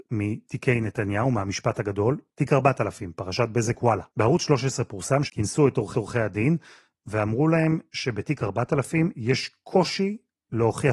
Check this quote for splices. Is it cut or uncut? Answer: cut